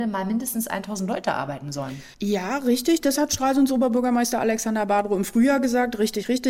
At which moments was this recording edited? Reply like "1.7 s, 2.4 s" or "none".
2.1 s